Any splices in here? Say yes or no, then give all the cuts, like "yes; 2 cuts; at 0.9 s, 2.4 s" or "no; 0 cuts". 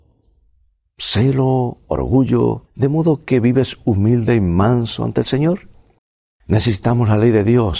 yes; 2 cuts; at 2.7 s, 6.0 s